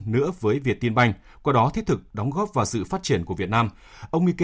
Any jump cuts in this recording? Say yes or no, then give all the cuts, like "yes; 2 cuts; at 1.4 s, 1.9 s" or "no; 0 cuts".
no; 0 cuts